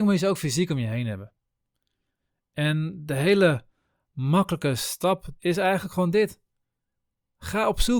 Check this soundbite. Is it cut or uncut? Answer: cut